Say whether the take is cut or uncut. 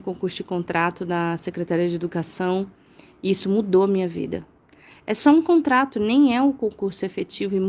uncut